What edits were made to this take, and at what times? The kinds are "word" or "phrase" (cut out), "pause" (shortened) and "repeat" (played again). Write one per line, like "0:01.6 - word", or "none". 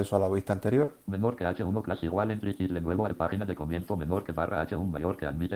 0:03.1 - phrase